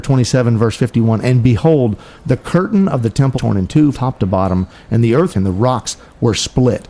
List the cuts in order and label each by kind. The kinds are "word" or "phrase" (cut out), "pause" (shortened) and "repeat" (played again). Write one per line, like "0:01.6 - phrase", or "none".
0:03.3 - word
0:03.9 - word
0:05.3 - word

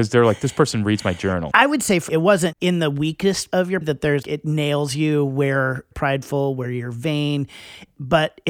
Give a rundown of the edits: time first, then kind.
0:02.1 - word
0:02.5 - word
0:03.5 - word
0:03.8 - word
0:04.2 - word
0:05.9 - phrase

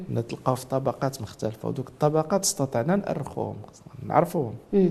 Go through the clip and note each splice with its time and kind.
none

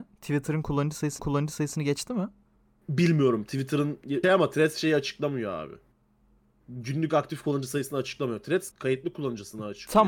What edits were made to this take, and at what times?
0:01.2 - repeat
0:02.6 - pause
0:04.2 - word
0:08.7 - word

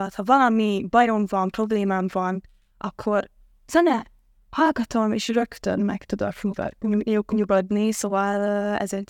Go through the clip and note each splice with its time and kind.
none

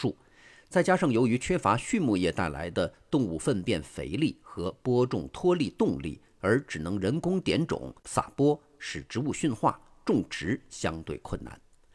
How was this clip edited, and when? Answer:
0:08.0 - pause

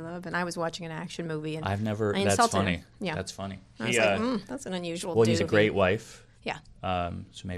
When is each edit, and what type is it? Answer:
0:05.4 - word

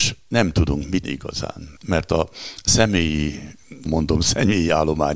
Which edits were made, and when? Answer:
0:01.0 - word
0:01.8 - pause
0:03.9 - word

